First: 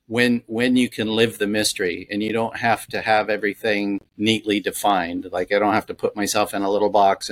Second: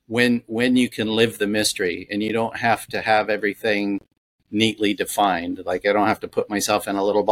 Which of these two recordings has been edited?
first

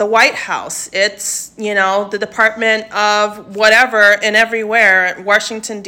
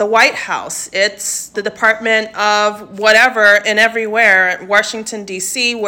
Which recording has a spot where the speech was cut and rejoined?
second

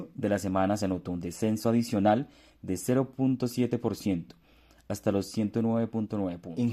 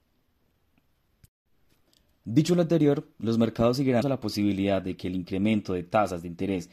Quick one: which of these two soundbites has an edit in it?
second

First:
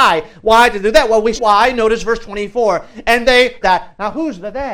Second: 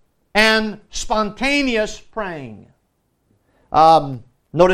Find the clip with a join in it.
first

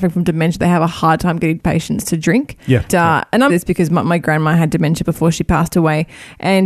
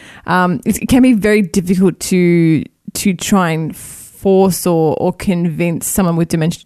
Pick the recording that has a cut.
first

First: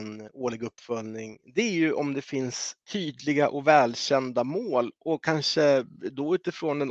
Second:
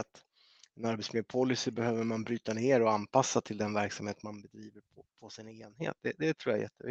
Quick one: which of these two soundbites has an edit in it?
first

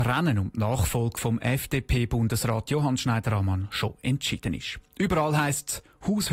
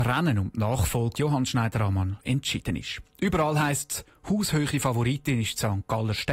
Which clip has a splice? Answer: second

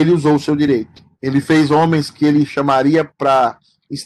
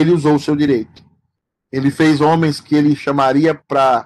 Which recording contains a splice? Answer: first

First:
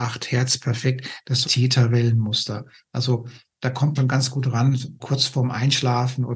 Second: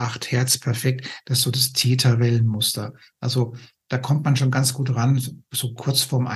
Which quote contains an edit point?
first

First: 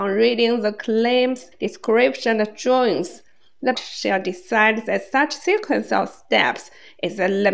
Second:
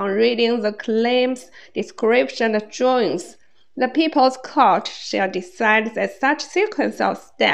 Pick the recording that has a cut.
first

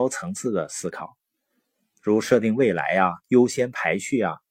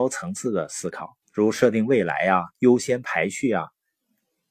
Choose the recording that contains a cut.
second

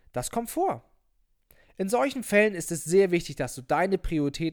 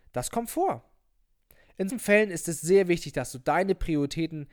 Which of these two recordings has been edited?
second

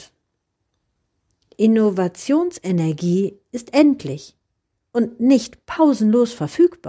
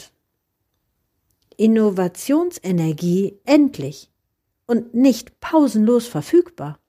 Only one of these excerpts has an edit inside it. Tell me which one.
second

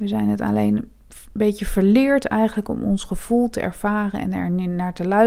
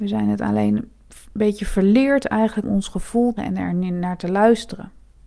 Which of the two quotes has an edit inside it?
second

